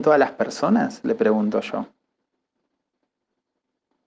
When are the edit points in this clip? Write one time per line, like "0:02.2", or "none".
none